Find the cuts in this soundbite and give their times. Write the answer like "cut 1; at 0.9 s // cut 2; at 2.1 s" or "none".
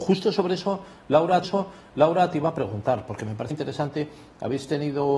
cut 1; at 1.4 s // cut 2; at 3.5 s